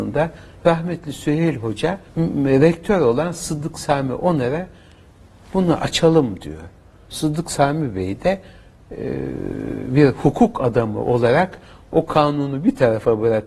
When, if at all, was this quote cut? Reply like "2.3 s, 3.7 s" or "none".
2.1 s